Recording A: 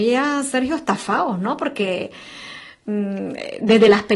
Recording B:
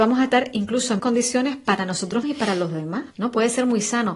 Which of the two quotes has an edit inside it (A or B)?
B